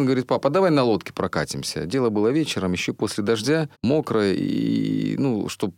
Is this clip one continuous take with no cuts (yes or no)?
no